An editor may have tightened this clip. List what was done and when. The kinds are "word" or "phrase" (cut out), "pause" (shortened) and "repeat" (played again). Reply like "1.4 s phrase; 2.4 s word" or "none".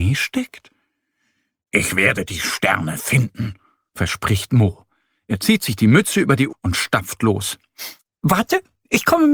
6.5 s word